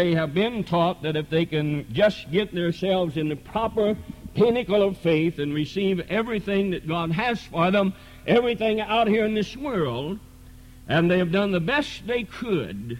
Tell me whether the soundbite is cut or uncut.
uncut